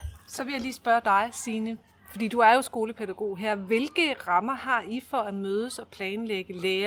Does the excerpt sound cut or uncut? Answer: uncut